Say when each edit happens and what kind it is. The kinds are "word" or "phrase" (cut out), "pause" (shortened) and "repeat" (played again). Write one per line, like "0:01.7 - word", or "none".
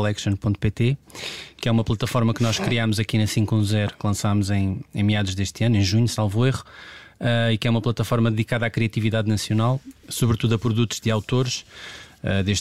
none